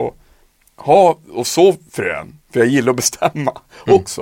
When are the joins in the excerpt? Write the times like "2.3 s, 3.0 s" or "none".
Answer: 2.4 s